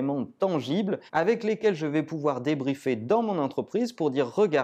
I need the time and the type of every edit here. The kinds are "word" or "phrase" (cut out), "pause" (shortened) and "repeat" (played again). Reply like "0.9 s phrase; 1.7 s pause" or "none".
1.1 s pause